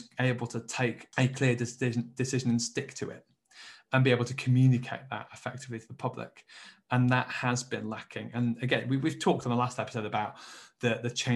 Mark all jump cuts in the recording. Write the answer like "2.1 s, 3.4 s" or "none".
none